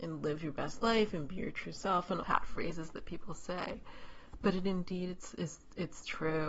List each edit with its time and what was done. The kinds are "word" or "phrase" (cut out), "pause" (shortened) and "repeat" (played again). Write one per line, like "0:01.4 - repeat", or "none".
0:02.2 - phrase